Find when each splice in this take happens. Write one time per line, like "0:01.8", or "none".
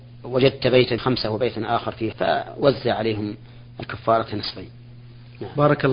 0:01.0
0:02.1